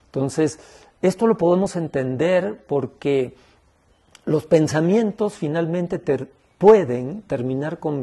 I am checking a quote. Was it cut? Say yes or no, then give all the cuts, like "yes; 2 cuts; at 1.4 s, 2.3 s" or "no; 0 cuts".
no; 0 cuts